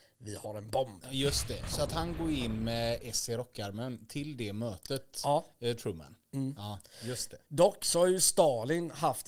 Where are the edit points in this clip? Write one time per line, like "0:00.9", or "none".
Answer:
none